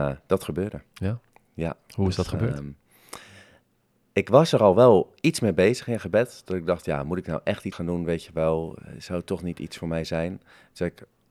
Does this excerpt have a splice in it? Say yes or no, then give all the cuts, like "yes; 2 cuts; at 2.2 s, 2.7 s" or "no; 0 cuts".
yes; 1 cut; at 7.7 s